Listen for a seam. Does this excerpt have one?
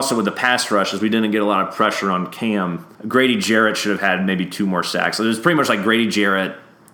yes; 1 cut; at 2.9 s

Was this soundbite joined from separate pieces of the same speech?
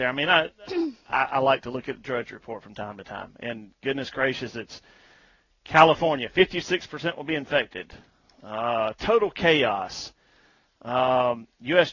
no; 0 cuts

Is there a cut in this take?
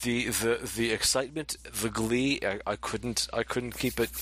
no; 0 cuts

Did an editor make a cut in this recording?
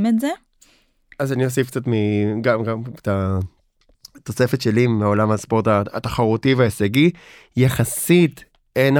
no; 0 cuts

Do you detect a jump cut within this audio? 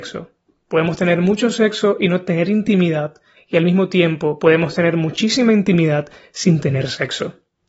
no; 0 cuts

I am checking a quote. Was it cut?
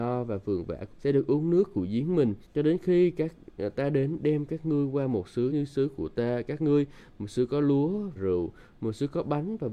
yes; 4 cuts; at 0.9 s, 2.4 s, 5.5 s, 8.1 s

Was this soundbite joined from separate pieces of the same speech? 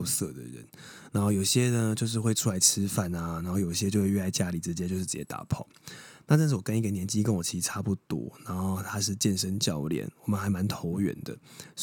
no; 0 cuts

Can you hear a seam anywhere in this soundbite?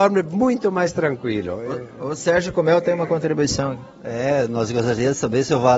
no; 0 cuts

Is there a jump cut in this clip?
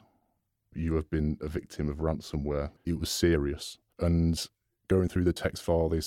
yes; 1 cut; at 3.9 s

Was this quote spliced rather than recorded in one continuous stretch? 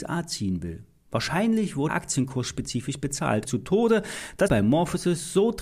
yes; 3 cuts; at 1.9 s, 3.4 s, 4.5 s

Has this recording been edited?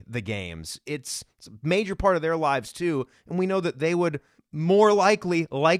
yes; 1 cut; at 4.4 s

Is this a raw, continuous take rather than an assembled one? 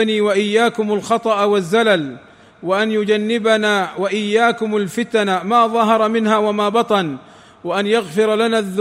yes; 0 cuts

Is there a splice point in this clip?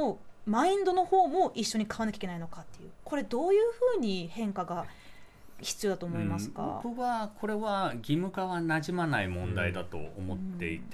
yes; 1 cut; at 6.8 s

